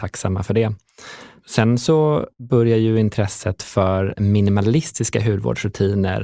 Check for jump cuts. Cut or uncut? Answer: cut